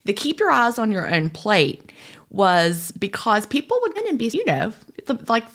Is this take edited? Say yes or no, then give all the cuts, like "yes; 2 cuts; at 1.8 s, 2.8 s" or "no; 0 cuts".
yes; 2 cuts; at 4.0 s, 4.3 s